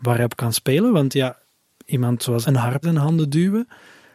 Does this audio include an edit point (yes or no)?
yes